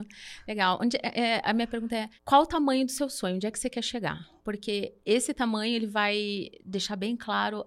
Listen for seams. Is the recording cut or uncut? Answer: cut